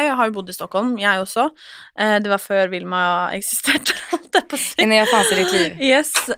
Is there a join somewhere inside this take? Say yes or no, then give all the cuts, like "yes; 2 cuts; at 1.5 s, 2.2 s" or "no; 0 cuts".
no; 0 cuts